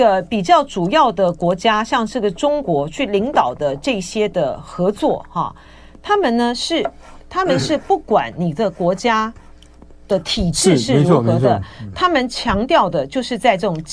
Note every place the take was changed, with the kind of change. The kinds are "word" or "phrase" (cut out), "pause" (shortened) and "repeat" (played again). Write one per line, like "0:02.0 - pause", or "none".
none